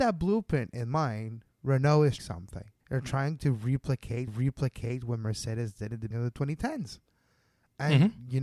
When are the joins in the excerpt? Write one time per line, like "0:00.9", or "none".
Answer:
0:01.5
0:02.2
0:02.8
0:04.3
0:06.1